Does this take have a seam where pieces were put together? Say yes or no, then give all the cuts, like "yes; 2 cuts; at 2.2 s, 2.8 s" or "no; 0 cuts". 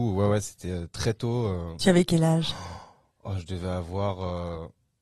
no; 0 cuts